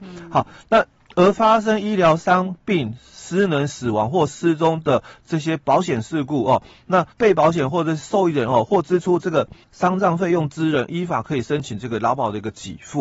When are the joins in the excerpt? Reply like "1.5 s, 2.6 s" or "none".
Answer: 7.1 s, 9.6 s